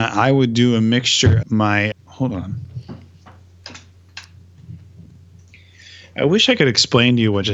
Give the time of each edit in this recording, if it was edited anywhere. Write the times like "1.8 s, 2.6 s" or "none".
1.4 s, 1.9 s